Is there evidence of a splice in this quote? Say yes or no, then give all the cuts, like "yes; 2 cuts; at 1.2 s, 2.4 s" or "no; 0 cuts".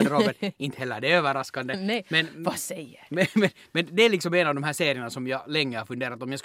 no; 0 cuts